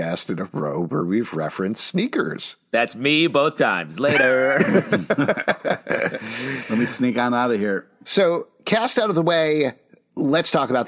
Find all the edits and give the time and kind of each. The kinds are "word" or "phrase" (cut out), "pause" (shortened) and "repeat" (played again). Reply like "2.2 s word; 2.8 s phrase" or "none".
none